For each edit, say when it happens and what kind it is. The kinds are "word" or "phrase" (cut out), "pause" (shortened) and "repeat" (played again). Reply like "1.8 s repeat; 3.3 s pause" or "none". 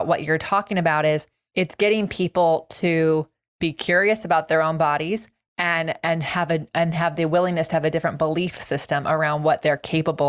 none